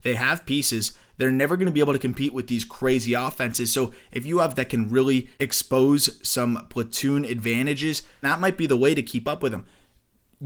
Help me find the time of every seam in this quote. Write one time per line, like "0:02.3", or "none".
0:04.6
0:05.3
0:08.2